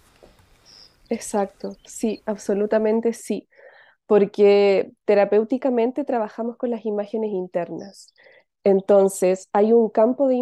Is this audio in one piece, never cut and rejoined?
yes; 0 cuts

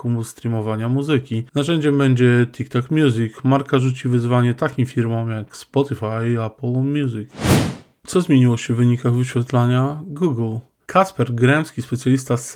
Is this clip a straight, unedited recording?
yes; 0 cuts

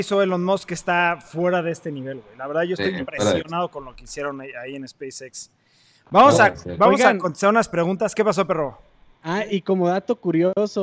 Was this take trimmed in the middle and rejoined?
no; 0 cuts

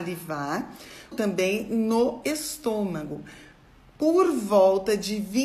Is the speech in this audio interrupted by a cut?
yes; 1 cut; at 1.1 s

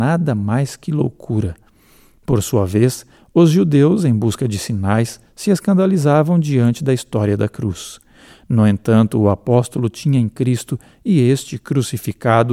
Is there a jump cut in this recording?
no; 0 cuts

